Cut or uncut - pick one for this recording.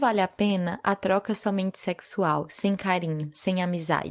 uncut